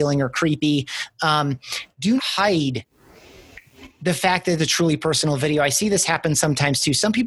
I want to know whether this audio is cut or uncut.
cut